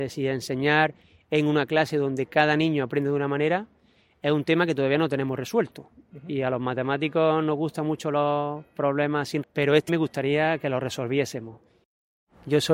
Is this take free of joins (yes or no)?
no